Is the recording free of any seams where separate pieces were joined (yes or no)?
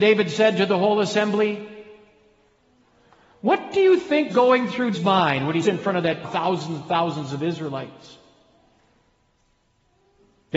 no